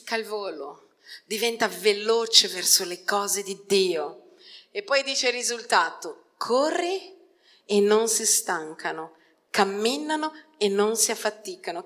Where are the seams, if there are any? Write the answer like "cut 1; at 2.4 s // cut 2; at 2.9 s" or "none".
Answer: none